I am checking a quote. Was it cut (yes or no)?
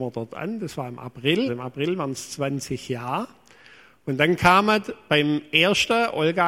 yes